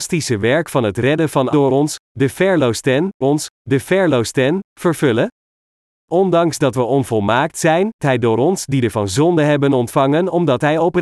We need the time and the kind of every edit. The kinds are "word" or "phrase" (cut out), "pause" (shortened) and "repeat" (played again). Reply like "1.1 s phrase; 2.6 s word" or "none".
1.5 s word; 3.2 s repeat; 8.0 s word; 8.9 s word